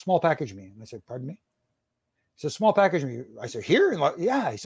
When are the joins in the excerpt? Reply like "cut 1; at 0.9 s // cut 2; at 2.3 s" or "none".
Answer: none